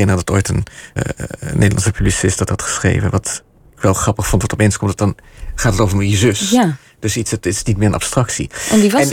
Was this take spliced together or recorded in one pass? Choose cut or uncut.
cut